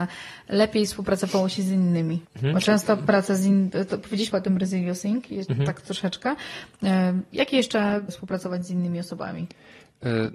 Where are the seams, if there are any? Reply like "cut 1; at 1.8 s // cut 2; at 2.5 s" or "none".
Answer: cut 1; at 2.2 s // cut 2; at 4.3 s // cut 3; at 8.1 s